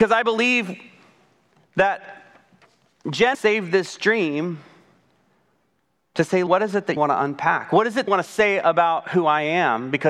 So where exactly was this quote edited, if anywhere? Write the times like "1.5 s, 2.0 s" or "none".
3.3 s, 6.5 s, 7.0 s, 8.1 s